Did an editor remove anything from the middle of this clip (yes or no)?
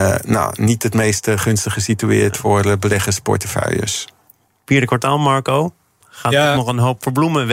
no